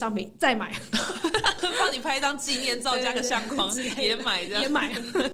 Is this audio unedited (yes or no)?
yes